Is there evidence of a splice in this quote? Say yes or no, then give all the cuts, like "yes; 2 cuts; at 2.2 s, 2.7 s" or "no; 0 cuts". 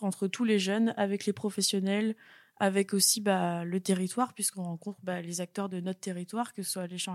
no; 0 cuts